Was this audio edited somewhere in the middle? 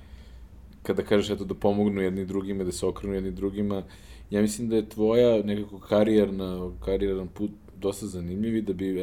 no; 0 cuts

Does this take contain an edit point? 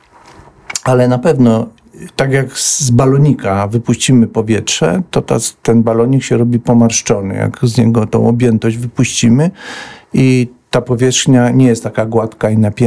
no; 0 cuts

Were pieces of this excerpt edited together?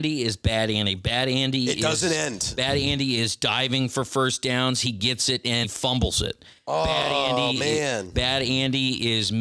yes; 1 cut; at 5.6 s

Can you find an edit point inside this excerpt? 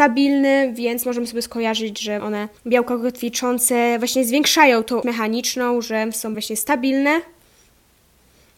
yes; 4 cuts; at 2.2 s, 2.6 s, 5.0 s, 6.3 s

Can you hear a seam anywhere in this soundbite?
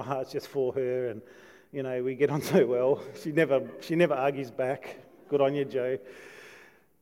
no; 0 cuts

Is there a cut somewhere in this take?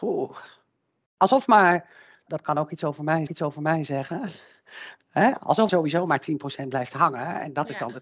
yes; 3 cuts; at 2.3 s, 3.3 s, 5.7 s

